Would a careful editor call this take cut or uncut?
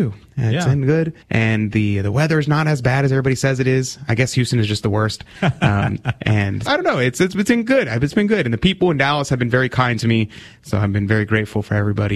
cut